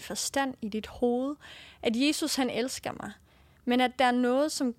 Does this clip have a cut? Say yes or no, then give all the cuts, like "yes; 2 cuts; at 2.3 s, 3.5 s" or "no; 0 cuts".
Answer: no; 0 cuts